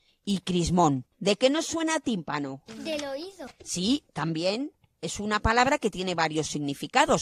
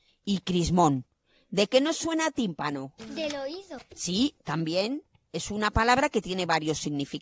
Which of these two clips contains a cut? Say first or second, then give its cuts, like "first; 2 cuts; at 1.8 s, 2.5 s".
first; 1 cut; at 1.1 s